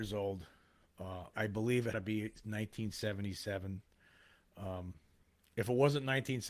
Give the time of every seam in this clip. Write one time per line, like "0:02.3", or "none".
0:01.3
0:01.9